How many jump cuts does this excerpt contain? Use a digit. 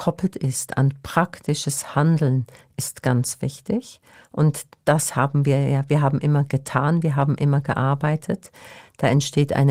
0